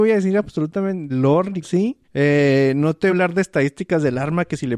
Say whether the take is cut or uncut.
cut